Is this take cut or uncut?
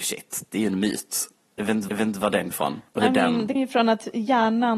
cut